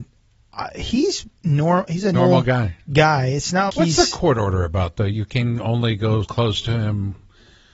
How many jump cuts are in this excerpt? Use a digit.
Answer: 4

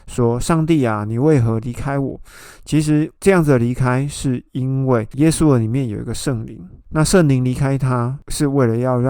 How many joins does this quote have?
1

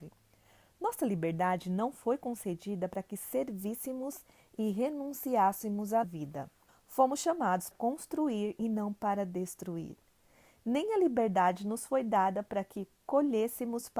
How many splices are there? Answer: 3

